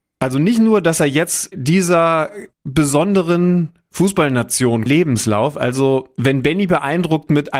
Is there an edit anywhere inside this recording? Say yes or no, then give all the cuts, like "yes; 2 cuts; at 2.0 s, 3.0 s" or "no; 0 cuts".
yes; 3 cuts; at 1.5 s, 2.5 s, 4.9 s